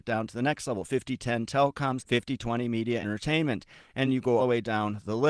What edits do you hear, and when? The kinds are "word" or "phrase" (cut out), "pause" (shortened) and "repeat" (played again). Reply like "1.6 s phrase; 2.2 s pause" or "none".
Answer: 2.0 s word; 3.0 s word; 4.0 s word; 4.4 s word